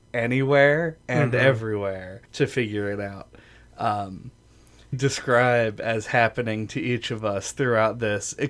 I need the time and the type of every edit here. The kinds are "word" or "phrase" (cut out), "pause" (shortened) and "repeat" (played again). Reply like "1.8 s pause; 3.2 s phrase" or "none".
2.3 s pause; 4.9 s phrase